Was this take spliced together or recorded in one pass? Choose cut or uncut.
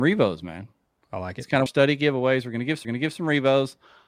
cut